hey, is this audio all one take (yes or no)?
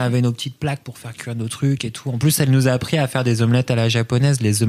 yes